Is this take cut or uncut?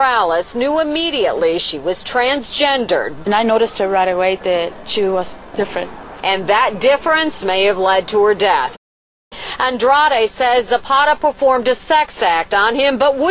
uncut